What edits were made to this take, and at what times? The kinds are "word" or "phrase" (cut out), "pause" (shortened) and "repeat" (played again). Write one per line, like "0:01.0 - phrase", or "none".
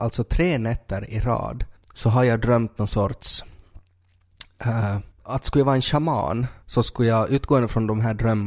0:01.8 - pause
0:05.1 - pause
0:06.6 - pause

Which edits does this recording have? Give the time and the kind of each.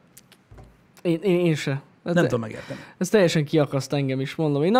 none

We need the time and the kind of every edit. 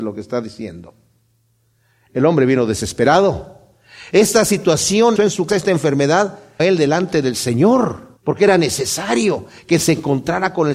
0:05.2 - phrase
0:05.5 - word
0:06.6 - phrase
0:08.2 - pause

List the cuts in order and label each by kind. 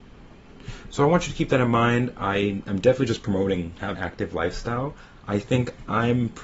0:04.0 - word

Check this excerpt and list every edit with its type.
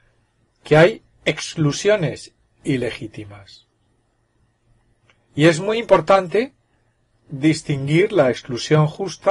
none

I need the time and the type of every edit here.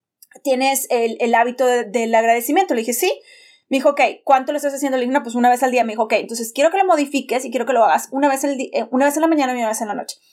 none

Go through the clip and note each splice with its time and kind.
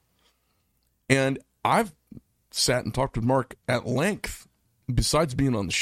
none

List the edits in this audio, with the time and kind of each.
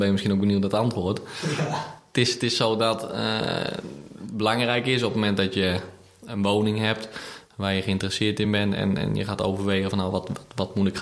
none

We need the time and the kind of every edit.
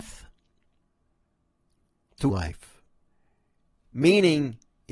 0:02.3 - word

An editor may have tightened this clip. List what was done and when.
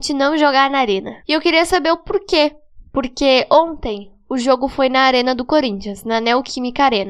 0:01.2 - pause
0:02.9 - pause

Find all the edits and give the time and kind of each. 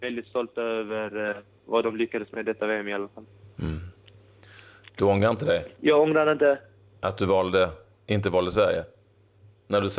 0:05.8 - pause

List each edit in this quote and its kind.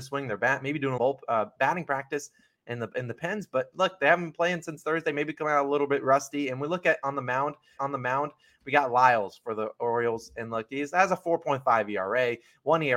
0:01.0 - phrase
0:07.8 - repeat

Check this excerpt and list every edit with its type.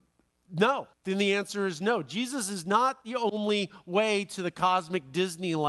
0:00.9 - pause

